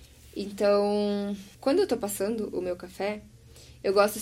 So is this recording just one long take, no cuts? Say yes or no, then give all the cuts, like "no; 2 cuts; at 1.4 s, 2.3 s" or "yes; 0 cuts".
no; 1 cut; at 1.5 s